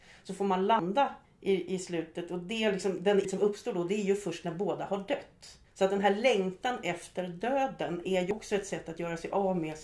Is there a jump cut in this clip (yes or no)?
yes